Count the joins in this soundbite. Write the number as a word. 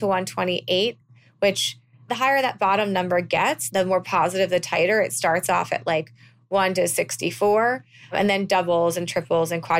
zero